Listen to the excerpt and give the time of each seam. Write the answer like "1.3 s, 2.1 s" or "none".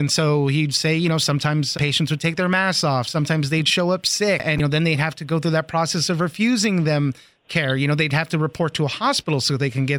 1.7 s

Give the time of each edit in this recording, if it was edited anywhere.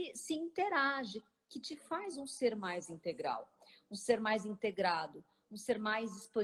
none

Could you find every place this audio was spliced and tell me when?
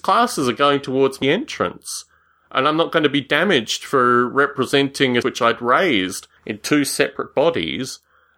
1.2 s, 5.2 s, 6.4 s

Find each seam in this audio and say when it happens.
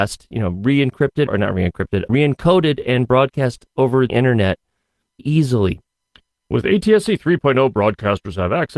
1.3 s, 2.1 s, 4.1 s, 5.2 s

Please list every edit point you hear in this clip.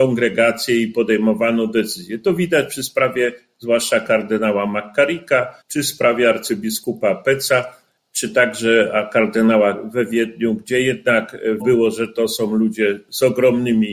5.6 s, 9.7 s, 11.6 s

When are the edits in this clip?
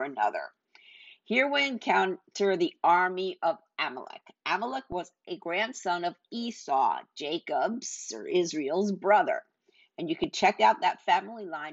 none

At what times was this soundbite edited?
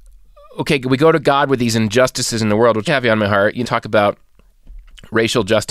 2.9 s, 3.6 s

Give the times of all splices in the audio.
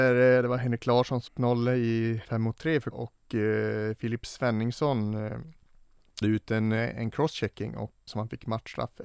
1.3 s, 2.2 s, 2.9 s, 6.2 s, 8.1 s

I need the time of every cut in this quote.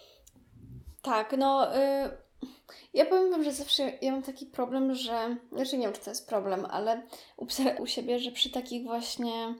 7.8 s

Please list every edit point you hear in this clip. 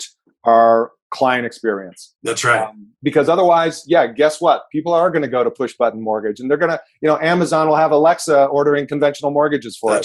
none

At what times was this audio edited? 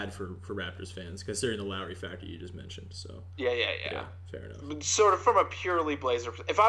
none

